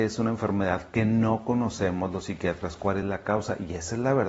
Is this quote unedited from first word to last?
yes; 0 cuts

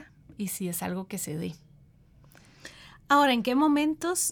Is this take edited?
no; 0 cuts

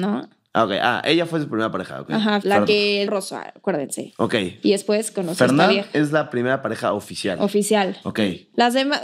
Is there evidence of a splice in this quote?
yes; 2 cuts; at 2.4 s, 3.1 s

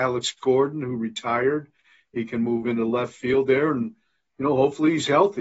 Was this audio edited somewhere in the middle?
no; 0 cuts

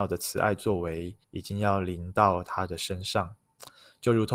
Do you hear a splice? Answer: yes; 1 cut; at 1.2 s

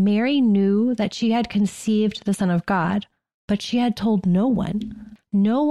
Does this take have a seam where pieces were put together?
no; 0 cuts

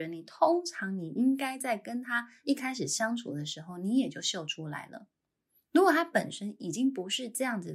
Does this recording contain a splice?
no; 0 cuts

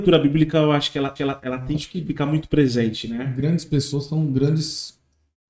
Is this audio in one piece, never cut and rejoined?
no; 1 cut; at 1.2 s

